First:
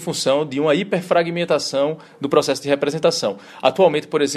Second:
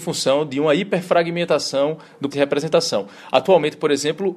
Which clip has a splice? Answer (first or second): second